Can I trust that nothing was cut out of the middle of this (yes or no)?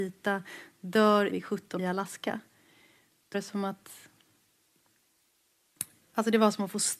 no